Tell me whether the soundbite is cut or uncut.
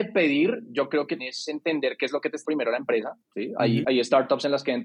cut